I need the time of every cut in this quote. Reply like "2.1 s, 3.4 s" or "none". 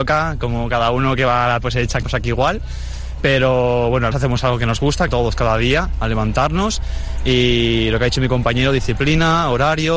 1.6 s, 2.0 s, 4.1 s, 5.1 s